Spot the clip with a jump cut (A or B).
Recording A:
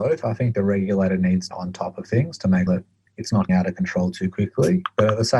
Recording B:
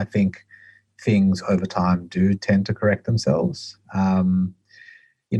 A